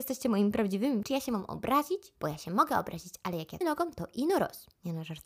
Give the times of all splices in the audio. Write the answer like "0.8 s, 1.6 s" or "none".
1.0 s, 3.6 s